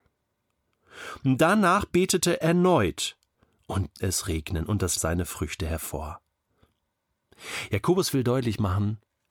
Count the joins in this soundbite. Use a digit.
3